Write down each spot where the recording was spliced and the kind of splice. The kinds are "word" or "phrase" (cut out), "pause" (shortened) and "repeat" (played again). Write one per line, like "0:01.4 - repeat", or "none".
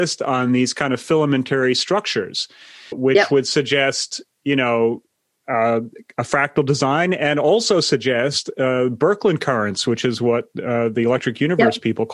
0:02.9 - word